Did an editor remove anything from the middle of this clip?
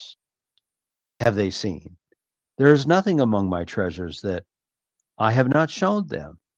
no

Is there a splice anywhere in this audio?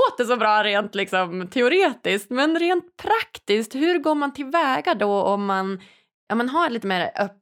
no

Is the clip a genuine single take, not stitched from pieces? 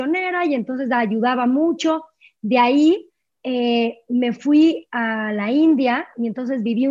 yes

